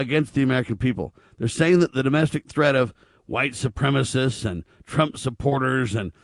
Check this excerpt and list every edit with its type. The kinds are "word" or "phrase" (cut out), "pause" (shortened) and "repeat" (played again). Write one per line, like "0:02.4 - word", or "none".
none